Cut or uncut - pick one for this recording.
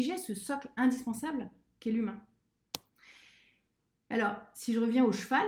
uncut